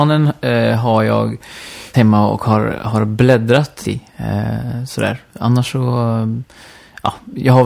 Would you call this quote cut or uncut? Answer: cut